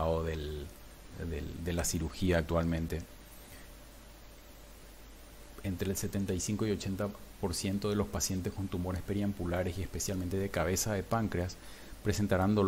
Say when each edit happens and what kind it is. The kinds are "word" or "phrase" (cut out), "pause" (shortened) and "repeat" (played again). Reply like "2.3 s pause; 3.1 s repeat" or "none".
none